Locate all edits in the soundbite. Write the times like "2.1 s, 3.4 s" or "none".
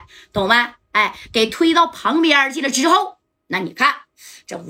none